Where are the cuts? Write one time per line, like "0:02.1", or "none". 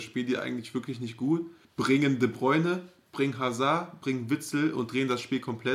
0:01.6